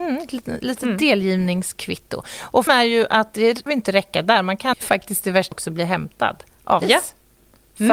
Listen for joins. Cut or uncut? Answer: cut